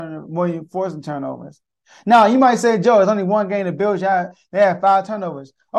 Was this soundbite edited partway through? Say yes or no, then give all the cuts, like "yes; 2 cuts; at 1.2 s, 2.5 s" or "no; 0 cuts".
no; 0 cuts